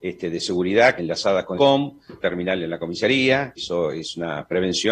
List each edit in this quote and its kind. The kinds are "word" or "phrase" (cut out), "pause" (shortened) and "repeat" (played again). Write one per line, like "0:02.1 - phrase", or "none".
0:01.0 - word
0:01.6 - word
0:02.2 - word
0:03.6 - word